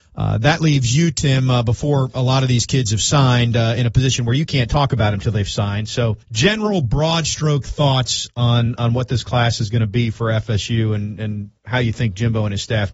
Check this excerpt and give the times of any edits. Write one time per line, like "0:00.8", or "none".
0:06.2
0:11.6